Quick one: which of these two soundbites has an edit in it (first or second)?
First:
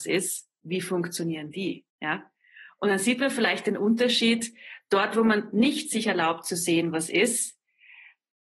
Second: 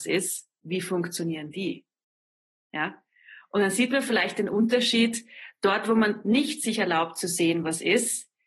first